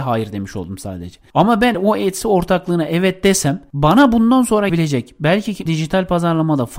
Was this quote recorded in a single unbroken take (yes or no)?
no